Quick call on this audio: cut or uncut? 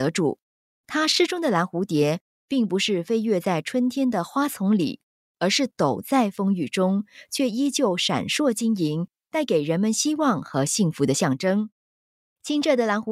uncut